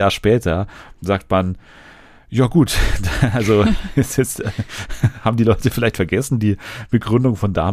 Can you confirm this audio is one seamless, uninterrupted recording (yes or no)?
yes